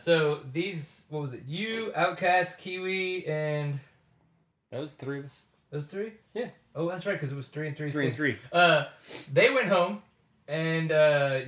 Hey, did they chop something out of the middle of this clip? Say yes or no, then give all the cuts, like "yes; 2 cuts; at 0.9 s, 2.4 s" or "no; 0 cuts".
no; 0 cuts